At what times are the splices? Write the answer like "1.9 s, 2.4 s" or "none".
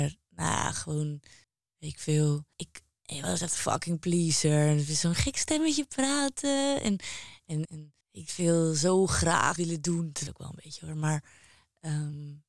1.4 s, 2.5 s, 7.6 s, 8.0 s, 9.6 s, 10.3 s